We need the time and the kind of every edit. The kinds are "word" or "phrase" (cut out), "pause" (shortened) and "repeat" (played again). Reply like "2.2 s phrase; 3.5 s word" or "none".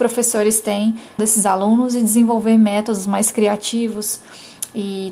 1.2 s phrase